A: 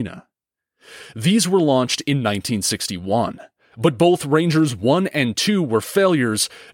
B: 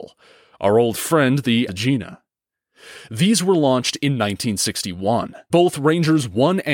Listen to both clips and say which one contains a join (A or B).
B